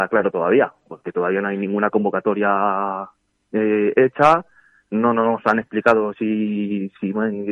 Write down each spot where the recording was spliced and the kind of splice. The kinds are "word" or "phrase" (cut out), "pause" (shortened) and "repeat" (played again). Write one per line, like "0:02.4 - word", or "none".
none